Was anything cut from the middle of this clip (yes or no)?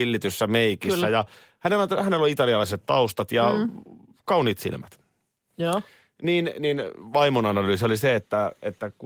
no